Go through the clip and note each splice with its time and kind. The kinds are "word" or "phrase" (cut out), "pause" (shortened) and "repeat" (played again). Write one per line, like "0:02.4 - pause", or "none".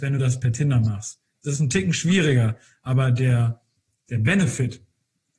none